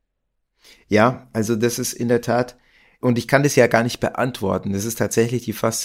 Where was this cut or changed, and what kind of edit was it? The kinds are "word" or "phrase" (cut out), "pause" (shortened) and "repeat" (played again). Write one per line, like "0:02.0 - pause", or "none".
none